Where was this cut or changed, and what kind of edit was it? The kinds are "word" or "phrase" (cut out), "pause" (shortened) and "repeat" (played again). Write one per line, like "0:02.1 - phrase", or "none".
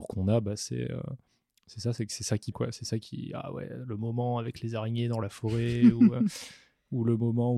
0:02.5 - word